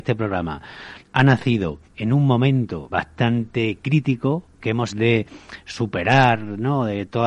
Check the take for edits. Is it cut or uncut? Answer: cut